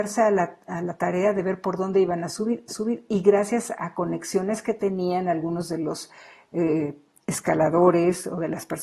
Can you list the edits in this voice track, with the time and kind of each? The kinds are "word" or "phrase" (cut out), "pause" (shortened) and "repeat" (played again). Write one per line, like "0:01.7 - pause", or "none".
0:02.7 - repeat